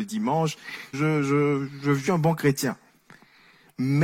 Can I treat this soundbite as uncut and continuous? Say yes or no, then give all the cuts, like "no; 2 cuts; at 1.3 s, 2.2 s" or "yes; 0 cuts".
no; 2 cuts; at 0.9 s, 2.1 s